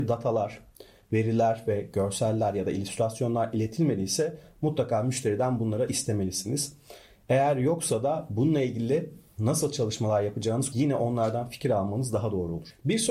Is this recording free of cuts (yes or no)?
no